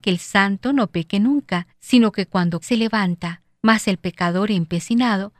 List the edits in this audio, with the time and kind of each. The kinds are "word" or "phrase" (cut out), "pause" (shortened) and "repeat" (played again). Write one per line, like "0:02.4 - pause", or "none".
0:01.7 - pause
0:02.6 - word
0:03.6 - pause